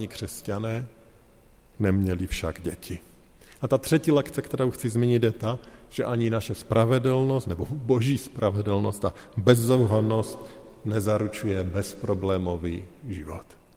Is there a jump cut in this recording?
no; 0 cuts

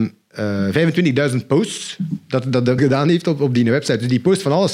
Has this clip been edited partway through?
yes; 1 cut; at 2.8 s

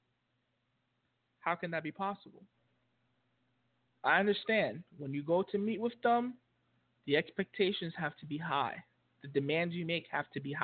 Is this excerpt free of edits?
yes; 0 cuts

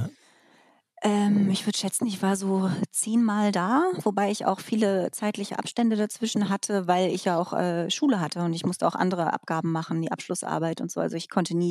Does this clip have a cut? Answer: no; 0 cuts

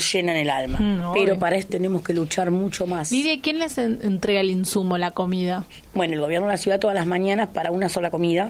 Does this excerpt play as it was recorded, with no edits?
no; 1 cut; at 1.7 s

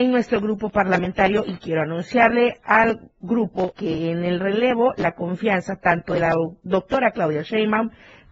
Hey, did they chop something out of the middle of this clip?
yes; 1 cut; at 3.7 s

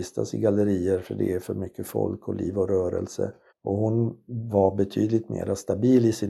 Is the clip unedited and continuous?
no; 1 cut; at 3.5 s

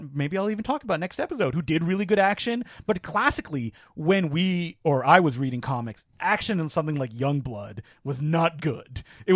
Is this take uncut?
no; 1 cut; at 6.1 s

